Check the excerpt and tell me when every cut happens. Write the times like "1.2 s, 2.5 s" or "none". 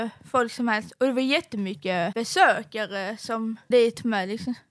3.7 s